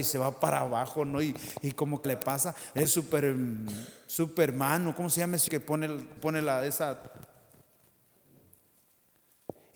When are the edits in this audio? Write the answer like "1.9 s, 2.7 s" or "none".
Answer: 2.0 s, 2.8 s, 5.5 s, 6.2 s